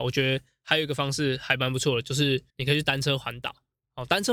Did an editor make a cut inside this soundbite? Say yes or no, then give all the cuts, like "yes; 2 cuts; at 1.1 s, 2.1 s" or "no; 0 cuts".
yes; 1 cut; at 2.5 s